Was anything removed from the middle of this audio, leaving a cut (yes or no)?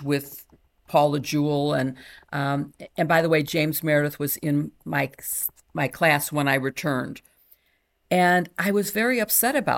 no